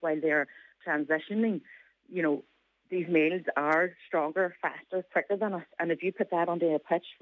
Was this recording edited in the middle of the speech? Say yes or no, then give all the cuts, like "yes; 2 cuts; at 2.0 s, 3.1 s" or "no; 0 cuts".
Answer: no; 0 cuts